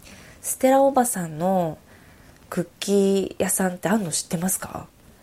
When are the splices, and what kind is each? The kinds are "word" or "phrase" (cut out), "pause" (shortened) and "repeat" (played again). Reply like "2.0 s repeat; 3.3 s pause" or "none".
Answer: 2.5 s phrase